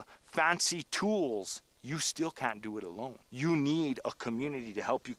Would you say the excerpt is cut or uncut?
cut